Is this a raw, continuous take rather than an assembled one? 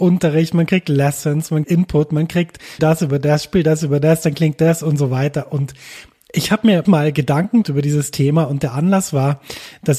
no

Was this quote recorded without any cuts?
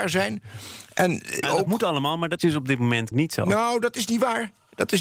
no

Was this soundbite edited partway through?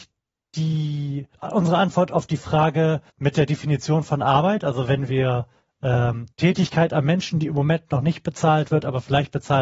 yes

